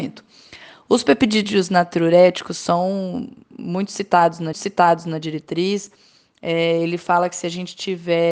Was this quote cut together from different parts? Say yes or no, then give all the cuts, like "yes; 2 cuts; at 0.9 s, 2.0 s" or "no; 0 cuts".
yes; 1 cut; at 4.5 s